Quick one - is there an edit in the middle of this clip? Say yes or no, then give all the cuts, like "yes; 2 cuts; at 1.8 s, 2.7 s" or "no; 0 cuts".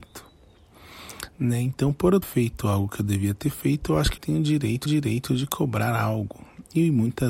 yes; 3 cuts; at 2.2 s, 4.2 s, 4.9 s